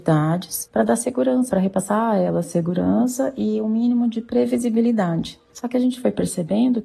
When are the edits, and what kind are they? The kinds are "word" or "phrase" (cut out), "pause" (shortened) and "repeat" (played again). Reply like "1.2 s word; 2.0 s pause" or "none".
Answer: 1.5 s word

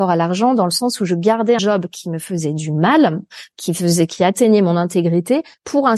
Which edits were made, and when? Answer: 1.6 s word

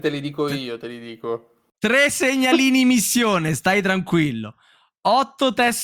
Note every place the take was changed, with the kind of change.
1.7 s pause

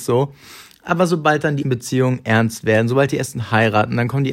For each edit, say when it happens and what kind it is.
1.6 s word

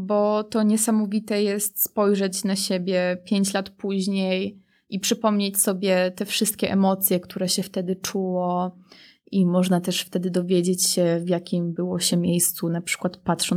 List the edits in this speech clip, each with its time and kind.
none

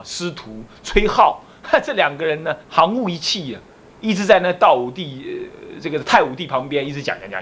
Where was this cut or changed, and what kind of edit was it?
2.6 s pause

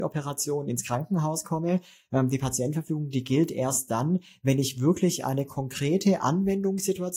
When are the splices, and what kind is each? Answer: none

